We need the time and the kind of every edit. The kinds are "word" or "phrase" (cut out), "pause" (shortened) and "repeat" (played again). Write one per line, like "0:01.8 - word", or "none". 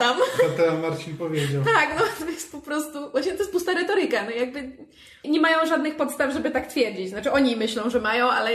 0:05.2 - word